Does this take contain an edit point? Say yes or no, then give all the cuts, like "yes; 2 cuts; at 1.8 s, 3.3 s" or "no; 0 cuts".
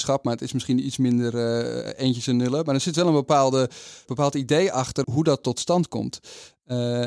yes; 2 cuts; at 4.1 s, 5.0 s